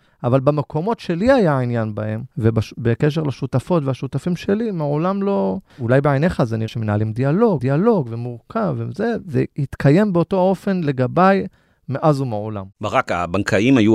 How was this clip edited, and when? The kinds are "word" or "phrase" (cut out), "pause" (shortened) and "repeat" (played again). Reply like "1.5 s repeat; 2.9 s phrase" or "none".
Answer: 2.3 s pause; 5.7 s pause; 6.7 s word; 7.6 s repeat